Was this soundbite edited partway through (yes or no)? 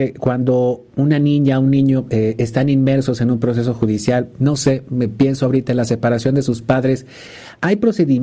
no